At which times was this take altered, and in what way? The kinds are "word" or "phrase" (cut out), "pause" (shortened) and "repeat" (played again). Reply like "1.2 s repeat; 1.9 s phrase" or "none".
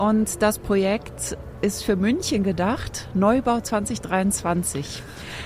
none